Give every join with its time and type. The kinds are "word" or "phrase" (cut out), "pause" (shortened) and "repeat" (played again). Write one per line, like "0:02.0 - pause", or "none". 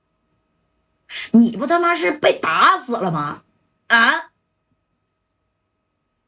none